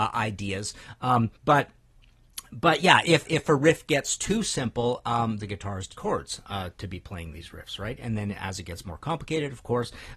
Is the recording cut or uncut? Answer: cut